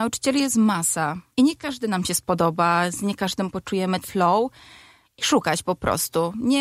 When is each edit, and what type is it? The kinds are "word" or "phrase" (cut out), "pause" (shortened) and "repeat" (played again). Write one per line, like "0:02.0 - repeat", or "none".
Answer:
0:01.3 - pause
0:04.0 - word